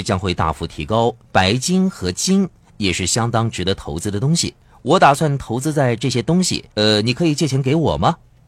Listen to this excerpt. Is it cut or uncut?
cut